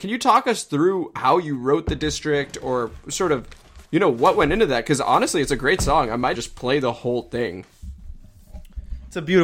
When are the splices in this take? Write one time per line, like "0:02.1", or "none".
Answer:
0:03.9
0:06.4